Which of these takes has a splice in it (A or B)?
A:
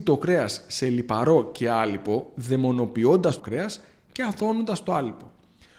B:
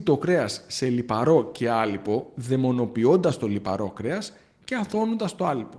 A